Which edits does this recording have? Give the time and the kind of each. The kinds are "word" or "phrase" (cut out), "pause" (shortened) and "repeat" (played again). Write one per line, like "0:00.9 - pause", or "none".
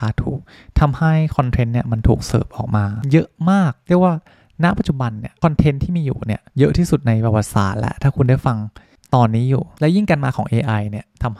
none